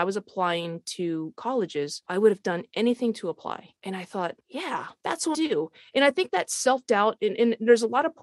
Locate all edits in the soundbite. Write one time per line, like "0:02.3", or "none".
0:05.3